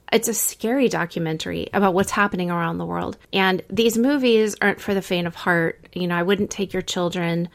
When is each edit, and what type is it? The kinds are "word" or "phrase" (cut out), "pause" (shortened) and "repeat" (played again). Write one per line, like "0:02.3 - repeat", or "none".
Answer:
0:03.2 - pause